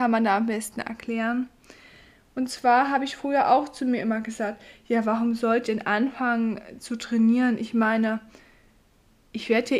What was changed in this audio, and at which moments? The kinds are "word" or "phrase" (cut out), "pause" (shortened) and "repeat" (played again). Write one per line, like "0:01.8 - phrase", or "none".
0:05.6 - word